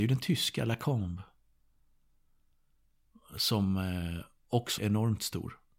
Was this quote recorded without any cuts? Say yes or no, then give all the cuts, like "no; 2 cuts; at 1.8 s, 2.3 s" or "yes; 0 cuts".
no; 1 cut; at 4.8 s